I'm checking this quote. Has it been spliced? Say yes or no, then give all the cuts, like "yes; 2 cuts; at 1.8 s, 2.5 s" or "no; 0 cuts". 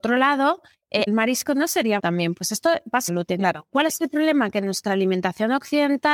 yes; 3 cuts; at 1.1 s, 2.0 s, 3.1 s